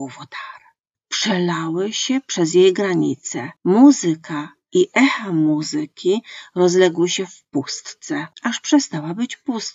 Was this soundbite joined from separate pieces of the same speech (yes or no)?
yes